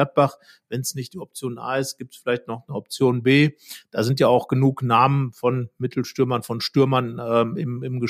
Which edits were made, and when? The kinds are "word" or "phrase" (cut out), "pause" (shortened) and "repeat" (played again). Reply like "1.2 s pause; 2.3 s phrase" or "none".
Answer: none